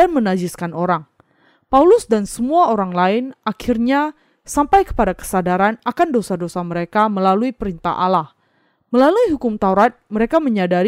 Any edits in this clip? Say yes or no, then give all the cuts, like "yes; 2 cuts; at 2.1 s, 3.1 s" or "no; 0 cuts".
no; 0 cuts